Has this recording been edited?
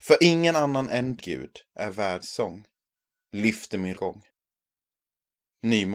yes; 4 cuts; at 1.2 s, 1.7 s, 2.2 s, 3.9 s

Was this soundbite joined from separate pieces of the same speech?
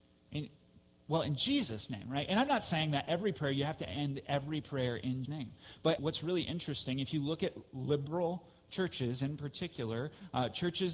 yes; 2 cuts; at 5.3 s, 6.0 s

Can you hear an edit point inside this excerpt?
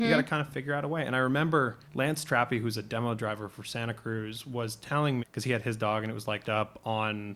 yes; 3 cuts; at 1.8 s, 5.2 s, 6.4 s

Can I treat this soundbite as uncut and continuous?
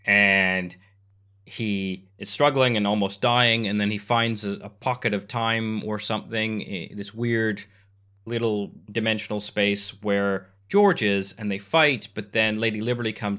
yes; 0 cuts

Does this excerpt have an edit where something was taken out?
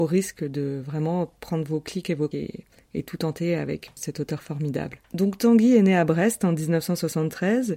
yes; 3 cuts; at 2.3 s, 3.9 s, 5.0 s

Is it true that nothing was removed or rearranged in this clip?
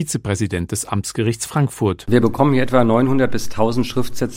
yes; 0 cuts

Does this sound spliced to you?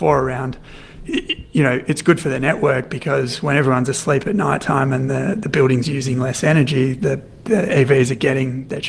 no; 0 cuts

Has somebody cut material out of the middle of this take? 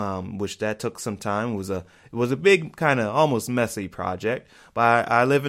no; 0 cuts

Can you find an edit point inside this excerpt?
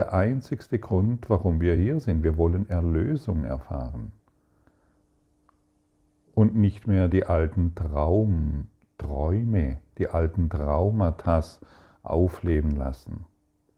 no; 0 cuts

